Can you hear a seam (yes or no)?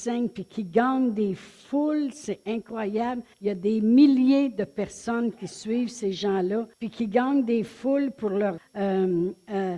yes